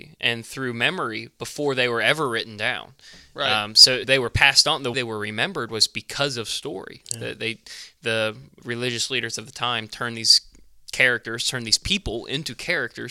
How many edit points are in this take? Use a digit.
3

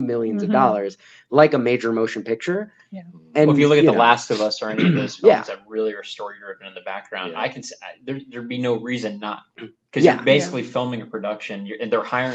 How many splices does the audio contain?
0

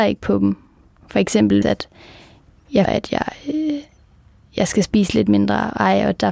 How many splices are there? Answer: 2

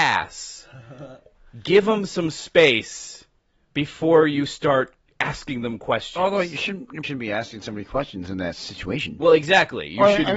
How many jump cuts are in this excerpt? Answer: 1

